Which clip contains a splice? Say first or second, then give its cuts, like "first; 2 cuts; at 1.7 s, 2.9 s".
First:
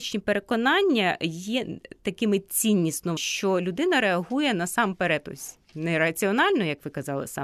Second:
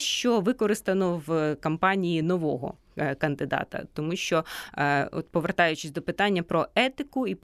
first; 1 cut; at 3.2 s